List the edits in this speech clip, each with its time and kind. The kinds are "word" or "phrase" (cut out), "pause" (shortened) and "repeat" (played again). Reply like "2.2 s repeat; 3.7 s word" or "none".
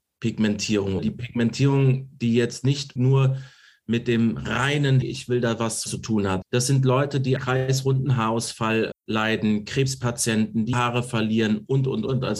1.0 s word; 3.0 s word; 5.0 s word; 5.9 s word; 6.4 s word; 7.4 s word; 8.9 s word; 10.7 s word